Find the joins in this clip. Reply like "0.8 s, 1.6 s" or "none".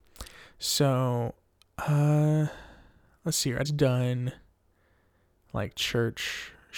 3.6 s